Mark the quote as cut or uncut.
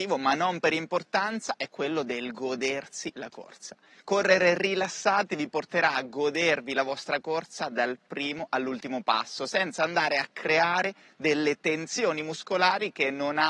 uncut